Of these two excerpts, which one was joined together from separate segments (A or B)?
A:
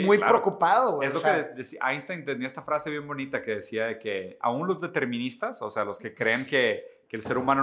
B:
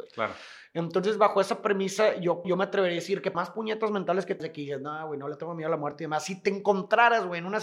B